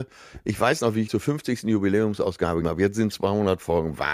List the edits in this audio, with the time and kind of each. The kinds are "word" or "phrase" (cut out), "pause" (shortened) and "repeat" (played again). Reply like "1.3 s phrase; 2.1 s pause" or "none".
1.1 s word; 2.6 s word; 3.1 s word